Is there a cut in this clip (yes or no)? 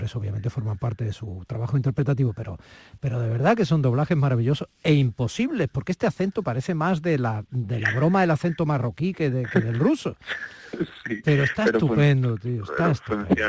no